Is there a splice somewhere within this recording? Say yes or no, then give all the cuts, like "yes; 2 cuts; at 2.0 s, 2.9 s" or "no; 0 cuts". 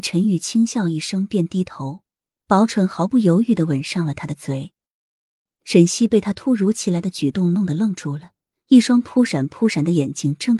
no; 0 cuts